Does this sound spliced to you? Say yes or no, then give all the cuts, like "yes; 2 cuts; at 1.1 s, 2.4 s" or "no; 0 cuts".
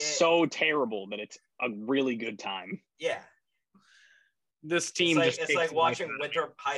yes; 1 cut; at 2.9 s